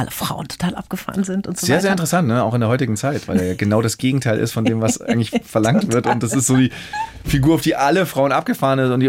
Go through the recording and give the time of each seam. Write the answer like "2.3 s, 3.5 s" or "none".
none